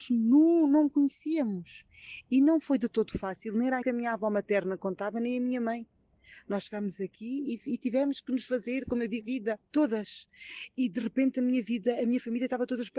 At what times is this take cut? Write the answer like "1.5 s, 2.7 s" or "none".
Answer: 3.8 s, 9.2 s, 9.6 s